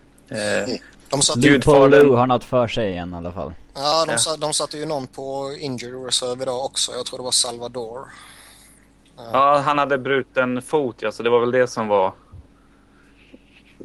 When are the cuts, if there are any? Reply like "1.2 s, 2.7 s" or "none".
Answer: 0.9 s, 3.6 s